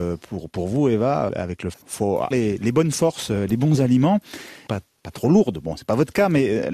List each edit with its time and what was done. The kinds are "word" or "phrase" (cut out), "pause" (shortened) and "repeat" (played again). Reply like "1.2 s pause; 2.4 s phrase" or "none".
1.3 s word; 1.7 s word; 2.3 s word; 4.7 s word